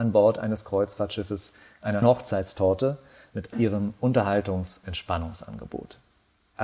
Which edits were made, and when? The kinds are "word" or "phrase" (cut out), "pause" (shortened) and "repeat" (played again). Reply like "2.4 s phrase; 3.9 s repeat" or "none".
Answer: 2.0 s word; 3.5 s word; 4.8 s word